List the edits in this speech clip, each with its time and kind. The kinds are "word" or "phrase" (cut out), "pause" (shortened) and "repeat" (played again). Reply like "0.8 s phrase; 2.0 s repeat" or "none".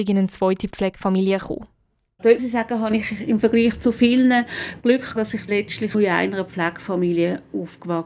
2.4 s word; 5.2 s word; 5.5 s word; 5.9 s word